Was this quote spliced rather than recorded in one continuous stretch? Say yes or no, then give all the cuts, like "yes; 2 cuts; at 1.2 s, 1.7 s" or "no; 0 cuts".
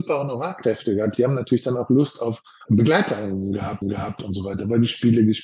yes; 2 cuts; at 2.7 s, 3.8 s